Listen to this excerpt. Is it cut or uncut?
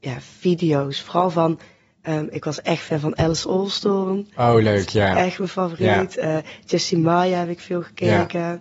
uncut